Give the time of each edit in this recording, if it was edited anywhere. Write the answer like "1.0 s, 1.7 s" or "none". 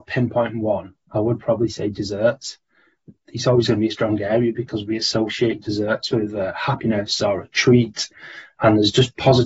none